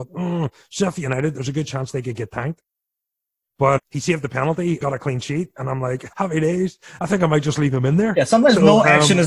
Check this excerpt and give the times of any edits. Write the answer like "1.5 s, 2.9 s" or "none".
3.8 s, 4.8 s, 6.1 s